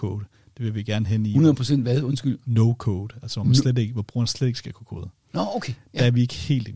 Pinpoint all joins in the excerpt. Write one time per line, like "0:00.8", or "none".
none